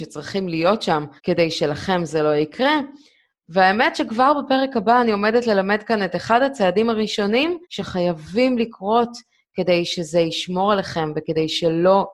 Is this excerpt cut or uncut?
cut